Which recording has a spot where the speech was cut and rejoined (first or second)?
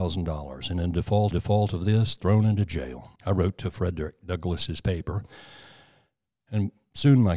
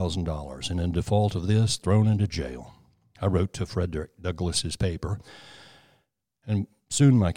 first